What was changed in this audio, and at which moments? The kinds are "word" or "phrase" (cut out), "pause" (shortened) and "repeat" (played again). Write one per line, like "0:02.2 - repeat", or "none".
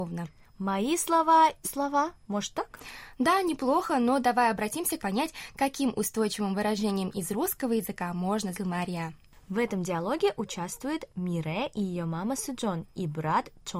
0:01.6 - phrase
0:05.0 - phrase
0:08.5 - phrase